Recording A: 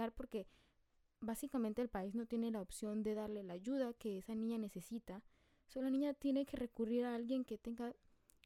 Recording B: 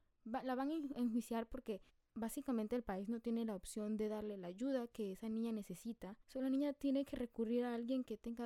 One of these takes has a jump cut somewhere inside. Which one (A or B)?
B